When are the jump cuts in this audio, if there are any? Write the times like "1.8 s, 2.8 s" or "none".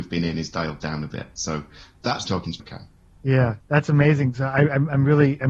2.2 s, 2.6 s, 3.6 s